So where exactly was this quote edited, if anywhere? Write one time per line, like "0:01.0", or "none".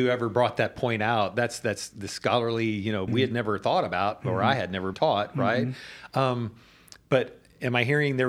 0:03.1
0:04.9

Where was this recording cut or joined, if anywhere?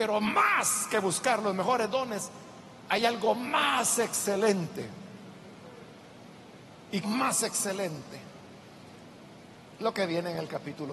0:07.0

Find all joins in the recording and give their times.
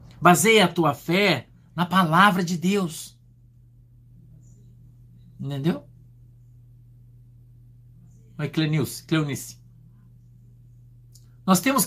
none

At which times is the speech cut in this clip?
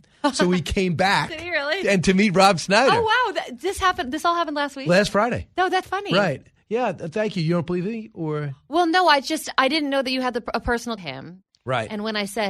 0:05.8
0:11.0

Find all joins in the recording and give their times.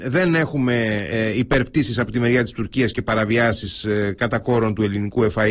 none

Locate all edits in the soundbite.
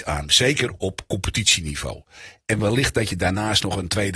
none

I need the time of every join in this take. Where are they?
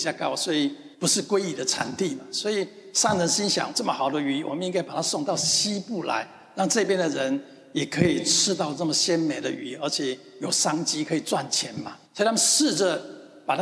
0:00.9
0:03.7
0:12.0

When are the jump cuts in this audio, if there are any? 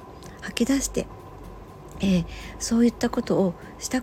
none

